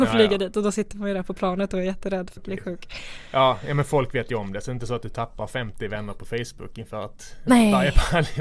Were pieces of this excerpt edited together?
yes; 1 cut; at 2.4 s

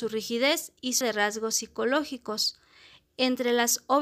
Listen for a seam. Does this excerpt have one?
yes; 1 cut; at 1.0 s

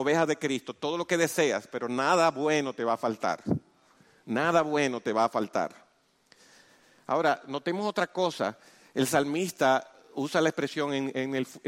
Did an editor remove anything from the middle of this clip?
no; 0 cuts

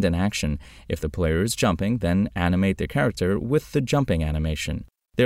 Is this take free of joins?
yes; 0 cuts

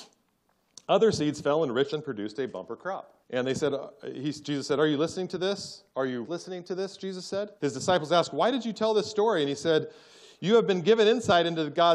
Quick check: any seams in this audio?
yes; 5 cuts; at 1.9 s, 3.2 s, 5.9 s, 6.2 s, 7.6 s

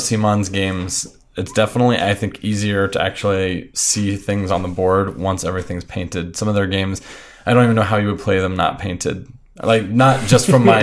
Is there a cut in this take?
no; 0 cuts

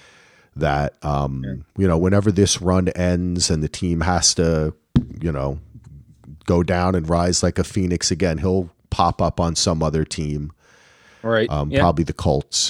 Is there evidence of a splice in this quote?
no; 0 cuts

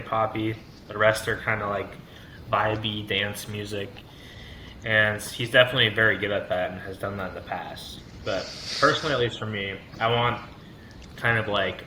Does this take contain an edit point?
no; 0 cuts

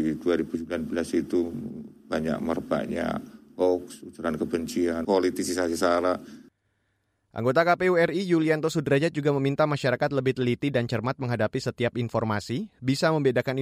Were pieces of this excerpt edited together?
no; 0 cuts

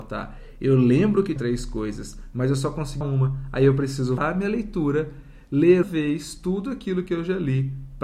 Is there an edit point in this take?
yes; 4 cuts; at 1.4 s, 3.0 s, 4.2 s, 5.8 s

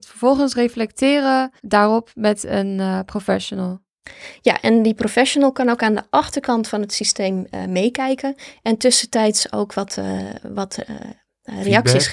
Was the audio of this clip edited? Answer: yes; 1 cut; at 1.6 s

